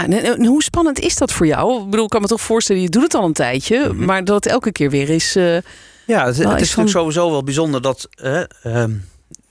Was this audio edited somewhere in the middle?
no; 0 cuts

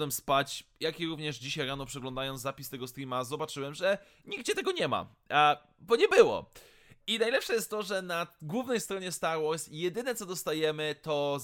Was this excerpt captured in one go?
yes; 0 cuts

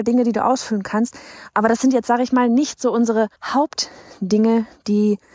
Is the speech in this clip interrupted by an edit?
yes; 1 cut; at 3.4 s

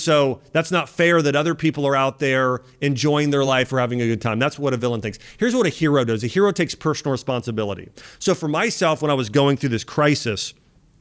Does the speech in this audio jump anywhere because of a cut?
no; 0 cuts

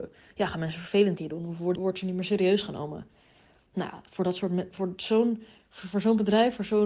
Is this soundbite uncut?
no; 2 cuts; at 1.2 s, 1.8 s

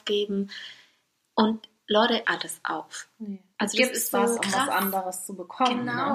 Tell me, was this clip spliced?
yes; 3 cuts; at 2.2 s, 3.5 s, 4.4 s

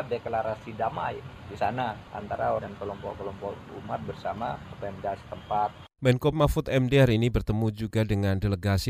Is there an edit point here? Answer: yes; 2 cuts; at 2.6 s, 6.3 s

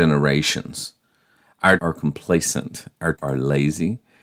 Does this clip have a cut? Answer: yes; 2 cuts; at 1.8 s, 3.1 s

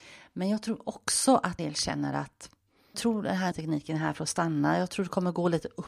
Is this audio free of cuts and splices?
no; 3 cuts; at 1.6 s, 2.9 s, 3.5 s

